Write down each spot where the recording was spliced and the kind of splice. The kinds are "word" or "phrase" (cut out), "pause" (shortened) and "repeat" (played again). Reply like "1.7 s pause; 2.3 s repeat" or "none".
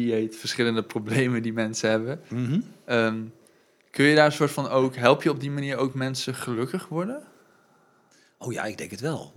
none